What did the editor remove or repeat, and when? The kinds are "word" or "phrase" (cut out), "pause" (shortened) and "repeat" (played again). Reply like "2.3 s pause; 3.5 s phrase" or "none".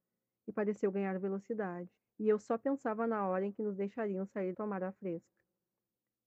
2.0 s pause; 4.5 s phrase